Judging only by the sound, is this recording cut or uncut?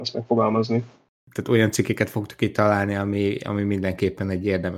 uncut